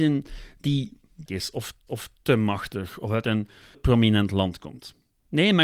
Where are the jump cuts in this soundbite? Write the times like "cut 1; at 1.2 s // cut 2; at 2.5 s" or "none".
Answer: cut 1; at 1.3 s // cut 2; at 1.9 s // cut 3; at 3.7 s